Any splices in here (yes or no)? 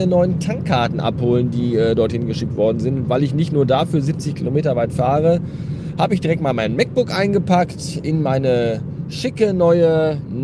no